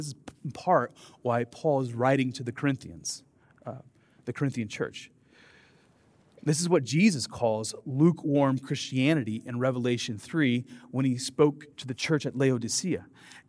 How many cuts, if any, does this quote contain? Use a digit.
1